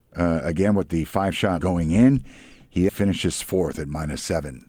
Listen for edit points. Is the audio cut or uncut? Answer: cut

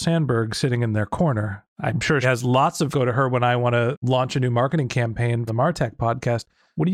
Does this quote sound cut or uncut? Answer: cut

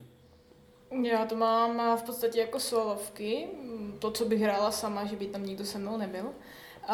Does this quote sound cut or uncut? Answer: uncut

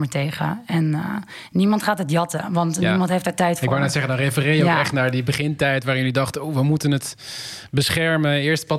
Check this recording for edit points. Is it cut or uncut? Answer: uncut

